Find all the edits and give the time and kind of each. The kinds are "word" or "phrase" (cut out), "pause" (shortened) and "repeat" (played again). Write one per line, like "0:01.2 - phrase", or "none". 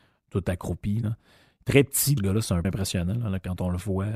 0:02.2 - word
0:02.6 - word